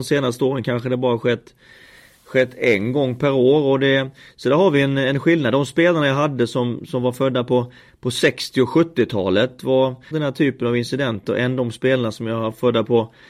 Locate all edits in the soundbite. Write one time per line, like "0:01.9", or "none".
0:10.1